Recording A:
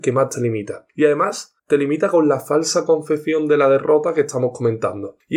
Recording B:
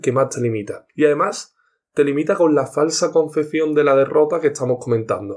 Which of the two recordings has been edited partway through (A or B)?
A